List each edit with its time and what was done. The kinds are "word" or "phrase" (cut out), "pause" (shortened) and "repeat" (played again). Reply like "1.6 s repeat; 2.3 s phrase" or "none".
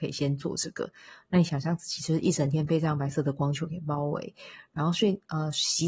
none